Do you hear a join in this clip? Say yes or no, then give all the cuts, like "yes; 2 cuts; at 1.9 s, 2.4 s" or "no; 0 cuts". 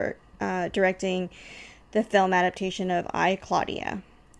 no; 0 cuts